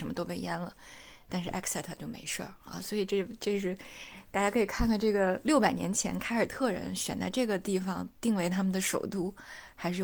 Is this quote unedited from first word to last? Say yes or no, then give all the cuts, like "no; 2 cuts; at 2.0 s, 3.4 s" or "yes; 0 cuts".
yes; 0 cuts